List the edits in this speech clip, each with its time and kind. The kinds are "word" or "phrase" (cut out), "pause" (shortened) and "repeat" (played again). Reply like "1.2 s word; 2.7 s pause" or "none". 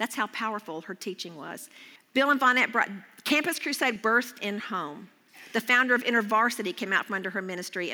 2.0 s pause; 4.0 s word; 4.6 s word